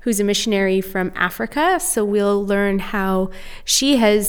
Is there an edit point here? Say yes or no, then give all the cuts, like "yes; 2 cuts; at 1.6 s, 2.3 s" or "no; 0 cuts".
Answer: no; 0 cuts